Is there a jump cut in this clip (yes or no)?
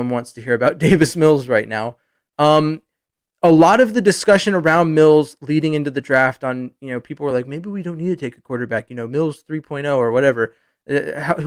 no